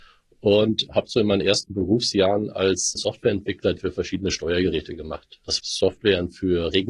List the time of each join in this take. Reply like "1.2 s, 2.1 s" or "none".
3.0 s, 3.8 s, 5.6 s